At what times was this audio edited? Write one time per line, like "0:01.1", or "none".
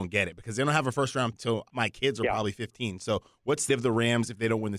0:01.3
0:01.7
0:03.7